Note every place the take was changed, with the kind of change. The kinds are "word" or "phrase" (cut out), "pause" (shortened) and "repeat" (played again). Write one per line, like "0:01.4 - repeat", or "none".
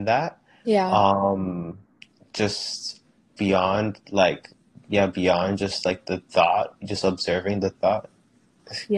none